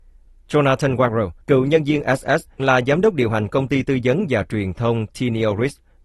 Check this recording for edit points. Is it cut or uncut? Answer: cut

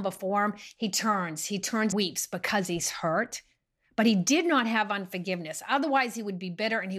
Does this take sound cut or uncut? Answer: cut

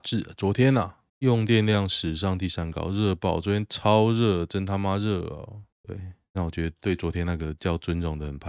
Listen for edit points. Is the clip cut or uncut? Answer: cut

